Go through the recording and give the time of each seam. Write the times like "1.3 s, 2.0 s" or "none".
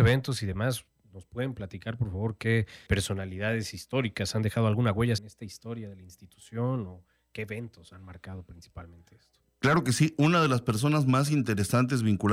2.9 s, 5.2 s